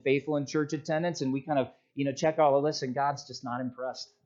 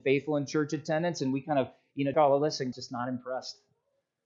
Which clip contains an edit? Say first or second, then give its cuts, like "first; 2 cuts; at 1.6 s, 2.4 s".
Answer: second; 2 cuts; at 2.1 s, 2.7 s